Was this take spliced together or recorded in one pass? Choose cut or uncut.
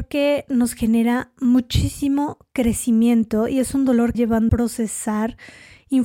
cut